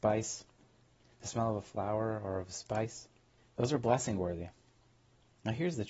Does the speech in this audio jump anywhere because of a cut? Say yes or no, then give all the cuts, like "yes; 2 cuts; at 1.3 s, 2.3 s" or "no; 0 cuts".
yes; 1 cut; at 3.4 s